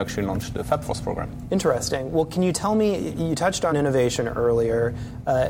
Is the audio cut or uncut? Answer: cut